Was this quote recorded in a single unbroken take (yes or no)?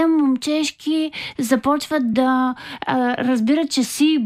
yes